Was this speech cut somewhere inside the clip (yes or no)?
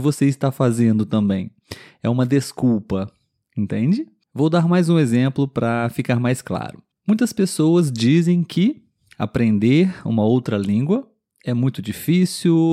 no